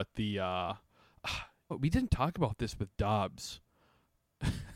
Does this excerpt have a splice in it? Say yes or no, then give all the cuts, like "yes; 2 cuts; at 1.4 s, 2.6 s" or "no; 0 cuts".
yes; 1 cut; at 1.7 s